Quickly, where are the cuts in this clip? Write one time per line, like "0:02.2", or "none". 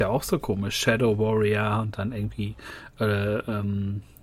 none